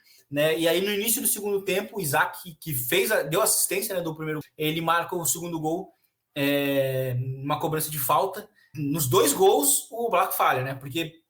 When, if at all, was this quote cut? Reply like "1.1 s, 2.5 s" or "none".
4.4 s, 8.7 s